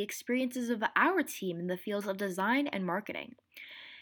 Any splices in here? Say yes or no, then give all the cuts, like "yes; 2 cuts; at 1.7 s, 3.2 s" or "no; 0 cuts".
no; 0 cuts